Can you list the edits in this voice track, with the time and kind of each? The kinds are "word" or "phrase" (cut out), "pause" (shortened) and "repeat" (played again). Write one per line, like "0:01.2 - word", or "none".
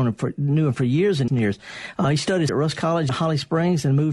0:01.3 - word
0:02.5 - word
0:03.1 - word